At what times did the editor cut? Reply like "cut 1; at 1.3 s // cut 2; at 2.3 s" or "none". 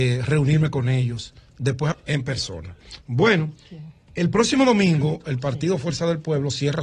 cut 1; at 1.9 s // cut 2; at 3.0 s

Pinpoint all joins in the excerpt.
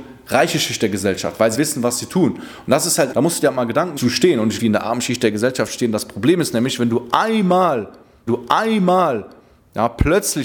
cut 1; at 1.5 s // cut 2; at 3.1 s // cut 3; at 4.0 s // cut 4; at 4.6 s // cut 5; at 8.3 s

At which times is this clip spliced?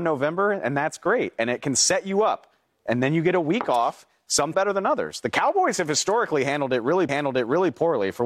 cut 1; at 4.5 s // cut 2; at 7.1 s

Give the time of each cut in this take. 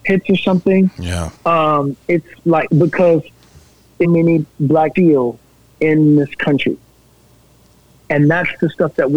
cut 1; at 1.4 s // cut 2; at 2.7 s // cut 3; at 4.0 s // cut 4; at 5.0 s // cut 5; at 5.6 s

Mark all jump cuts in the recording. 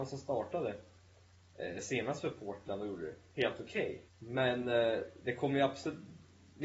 cut 1; at 4.1 s

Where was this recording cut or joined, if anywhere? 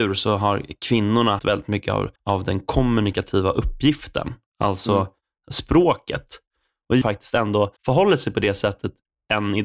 cut 1; at 1.4 s // cut 2; at 2.2 s // cut 3; at 7.0 s // cut 4; at 7.8 s

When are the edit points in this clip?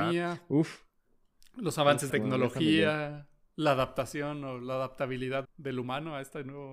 cut 1; at 2.1 s // cut 2; at 3.5 s // cut 3; at 5.4 s

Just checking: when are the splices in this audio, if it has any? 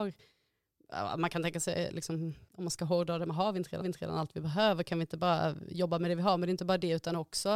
cut 1; at 2.5 s // cut 2; at 3.8 s

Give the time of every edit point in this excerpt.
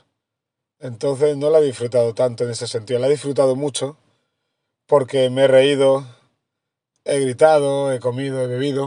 none

